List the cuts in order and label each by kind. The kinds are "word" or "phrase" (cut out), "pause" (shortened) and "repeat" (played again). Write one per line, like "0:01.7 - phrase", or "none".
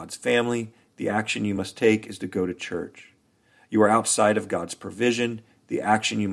none